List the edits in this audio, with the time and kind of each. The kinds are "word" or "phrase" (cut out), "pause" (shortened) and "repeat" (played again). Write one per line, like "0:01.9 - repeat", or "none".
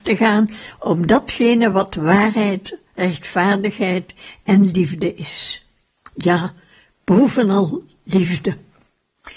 none